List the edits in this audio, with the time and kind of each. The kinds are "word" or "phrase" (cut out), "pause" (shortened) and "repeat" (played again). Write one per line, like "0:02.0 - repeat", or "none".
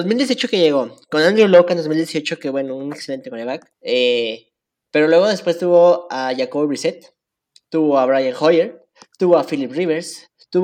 0:03.7 - pause